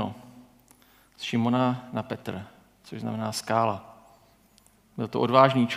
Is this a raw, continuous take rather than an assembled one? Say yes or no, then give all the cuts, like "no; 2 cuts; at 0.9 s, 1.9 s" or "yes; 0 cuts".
yes; 0 cuts